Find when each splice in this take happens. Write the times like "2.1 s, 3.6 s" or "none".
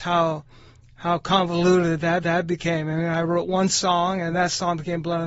2.2 s

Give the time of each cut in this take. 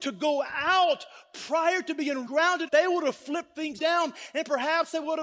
2.3 s, 2.7 s, 3.8 s

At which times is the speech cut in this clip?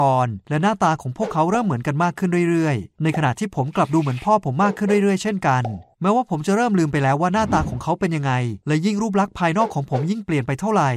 8.6 s

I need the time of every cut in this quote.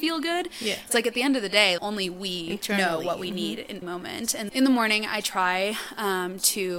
1.8 s, 3.8 s, 4.5 s

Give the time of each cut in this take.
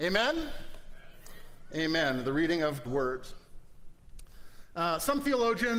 2.8 s

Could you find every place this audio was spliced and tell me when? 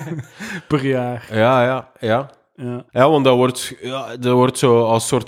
2.9 s

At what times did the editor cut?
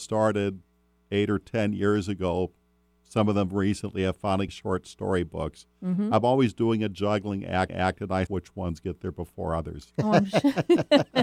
4.5 s, 7.7 s, 8.3 s

